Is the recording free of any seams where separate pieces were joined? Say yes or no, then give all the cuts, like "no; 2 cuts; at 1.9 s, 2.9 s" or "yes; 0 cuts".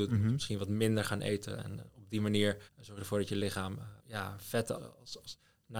no; 3 cuts; at 2.7 s, 4.0 s, 4.7 s